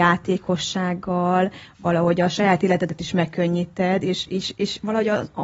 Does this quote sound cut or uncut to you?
uncut